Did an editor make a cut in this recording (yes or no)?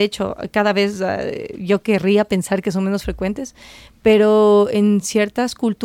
no